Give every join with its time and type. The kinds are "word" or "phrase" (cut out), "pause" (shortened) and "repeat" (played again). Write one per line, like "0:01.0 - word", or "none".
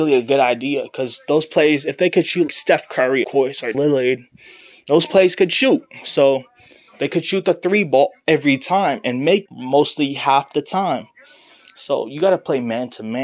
0:02.5 - word
0:03.2 - word
0:03.7 - word
0:09.5 - word